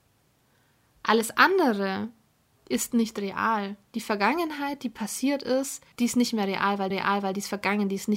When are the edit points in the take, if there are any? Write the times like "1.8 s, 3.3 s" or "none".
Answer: 2.5 s, 5.9 s, 6.9 s